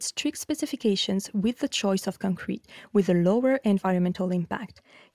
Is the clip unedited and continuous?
yes; 0 cuts

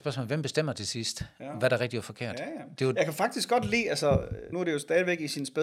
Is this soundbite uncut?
no; 1 cut; at 4.5 s

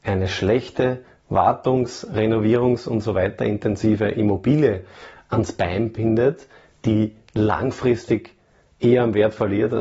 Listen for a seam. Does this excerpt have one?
no; 0 cuts

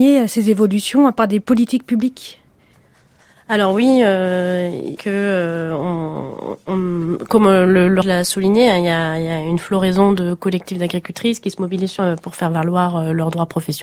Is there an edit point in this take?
yes; 5 cuts; at 2.7 s, 5.0 s, 7.3 s, 8.0 s, 12.0 s

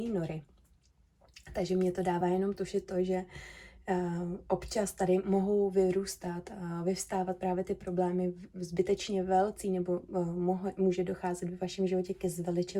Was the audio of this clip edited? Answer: no; 0 cuts

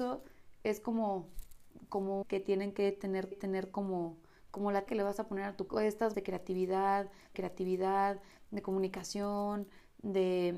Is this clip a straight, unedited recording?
no; 6 cuts; at 2.2 s, 3.3 s, 4.9 s, 5.7 s, 6.1 s, 7.3 s

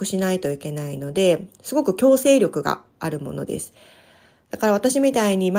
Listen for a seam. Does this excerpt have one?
no; 0 cuts

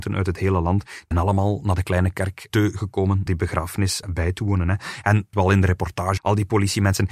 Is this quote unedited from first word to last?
no; 6 cuts; at 1.1 s, 2.5 s, 3.3 s, 4.0 s, 5.3 s, 6.2 s

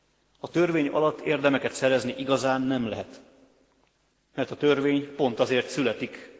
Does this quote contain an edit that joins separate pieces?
yes; 1 cut; at 3.9 s

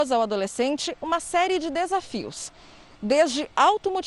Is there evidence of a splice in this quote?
no; 0 cuts

